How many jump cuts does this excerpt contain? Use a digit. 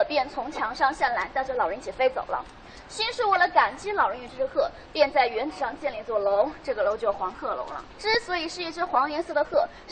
1